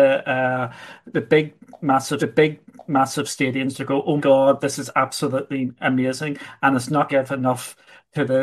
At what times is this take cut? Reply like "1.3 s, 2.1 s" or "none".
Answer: 2.2 s, 4.2 s, 7.1 s

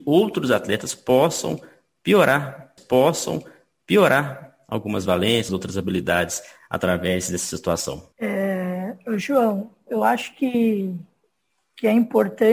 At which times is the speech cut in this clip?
2.8 s, 5.5 s, 8.1 s, 9.9 s

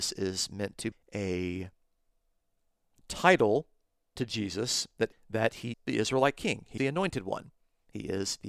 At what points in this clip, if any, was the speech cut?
0.9 s, 4.2 s, 5.1 s, 5.7 s, 6.8 s

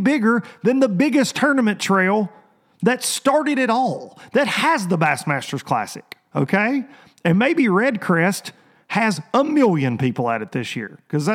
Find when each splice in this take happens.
none

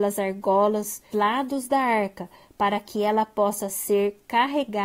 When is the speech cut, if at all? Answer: 1.1 s

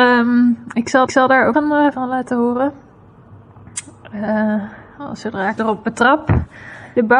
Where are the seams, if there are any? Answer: 1.1 s, 1.5 s, 1.9 s, 5.6 s

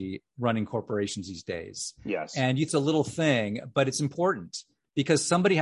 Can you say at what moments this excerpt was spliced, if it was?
2.7 s

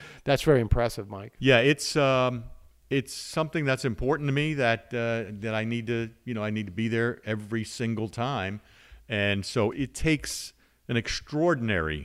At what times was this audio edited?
9.7 s

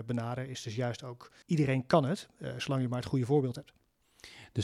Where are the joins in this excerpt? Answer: 1.4 s

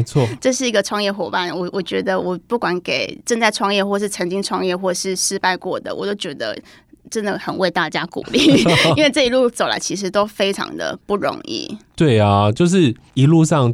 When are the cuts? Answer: none

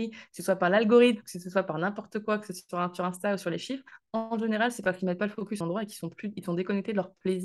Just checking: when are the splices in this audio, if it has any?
5.6 s

